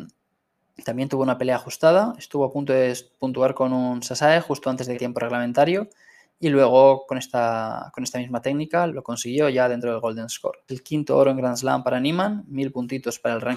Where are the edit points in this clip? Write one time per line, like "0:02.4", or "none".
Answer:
0:04.9
0:08.9
0:10.7